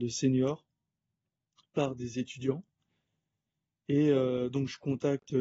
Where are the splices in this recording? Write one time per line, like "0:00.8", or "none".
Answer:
none